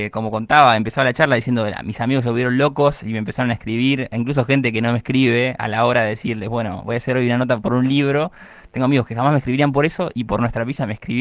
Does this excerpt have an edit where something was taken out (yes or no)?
no